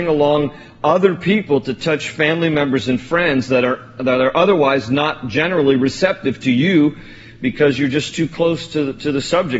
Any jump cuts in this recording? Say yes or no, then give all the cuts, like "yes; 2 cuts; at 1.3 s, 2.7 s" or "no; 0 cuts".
no; 0 cuts